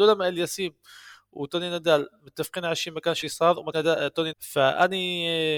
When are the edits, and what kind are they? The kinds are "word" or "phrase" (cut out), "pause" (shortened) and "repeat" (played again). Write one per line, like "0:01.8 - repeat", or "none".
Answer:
0:03.2 - word
0:03.7 - word
0:04.3 - phrase